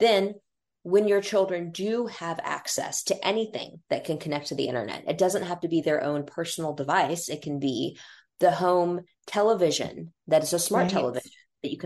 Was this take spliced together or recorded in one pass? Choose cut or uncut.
uncut